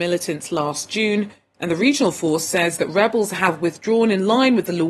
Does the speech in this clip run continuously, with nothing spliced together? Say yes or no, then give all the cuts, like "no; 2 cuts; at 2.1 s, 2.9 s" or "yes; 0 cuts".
yes; 0 cuts